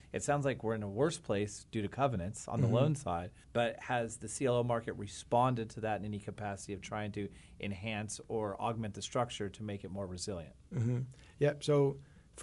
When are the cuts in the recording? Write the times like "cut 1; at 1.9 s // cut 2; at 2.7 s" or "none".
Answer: cut 1; at 3.4 s